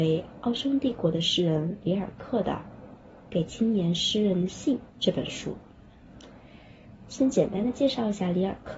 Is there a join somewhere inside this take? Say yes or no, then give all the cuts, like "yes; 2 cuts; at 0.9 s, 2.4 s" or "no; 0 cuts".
yes; 1 cut; at 4.9 s